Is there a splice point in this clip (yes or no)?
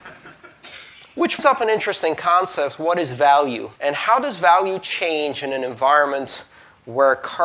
yes